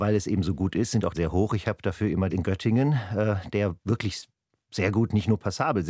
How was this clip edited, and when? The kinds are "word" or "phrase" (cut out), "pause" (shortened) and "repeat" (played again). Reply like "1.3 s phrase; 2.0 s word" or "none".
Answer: 1.1 s phrase; 2.3 s phrase